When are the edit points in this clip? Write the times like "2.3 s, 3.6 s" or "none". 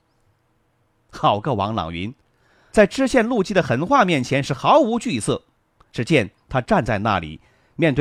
none

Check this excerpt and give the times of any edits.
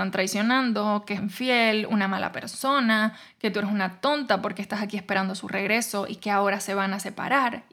1.2 s

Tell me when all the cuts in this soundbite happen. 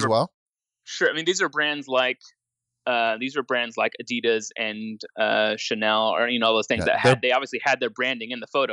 none

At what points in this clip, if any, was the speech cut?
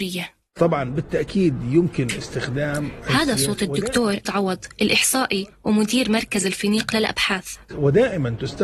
4.2 s

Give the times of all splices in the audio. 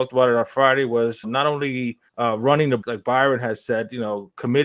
1.2 s, 2.1 s, 2.8 s

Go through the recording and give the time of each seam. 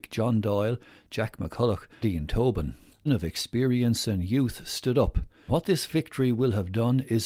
2.0 s, 3.1 s, 5.5 s

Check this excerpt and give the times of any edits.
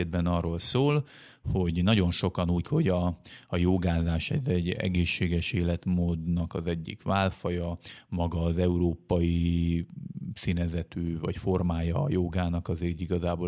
2.6 s, 11.2 s

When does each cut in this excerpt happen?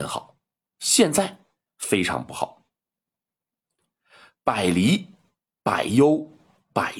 none

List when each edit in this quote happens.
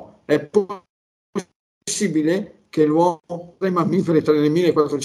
3.6 s

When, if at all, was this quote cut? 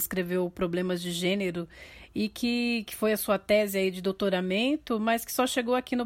none

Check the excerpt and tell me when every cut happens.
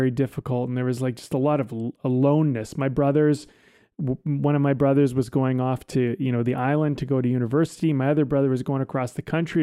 none

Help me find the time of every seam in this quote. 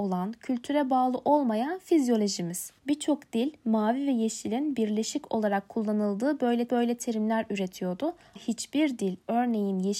2.8 s, 6.7 s, 8.4 s

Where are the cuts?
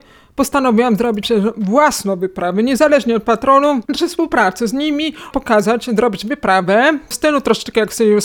1.2 s, 3.9 s, 5.3 s

